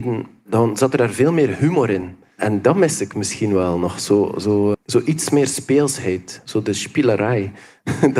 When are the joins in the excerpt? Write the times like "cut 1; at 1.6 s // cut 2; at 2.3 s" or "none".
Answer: cut 1; at 4.7 s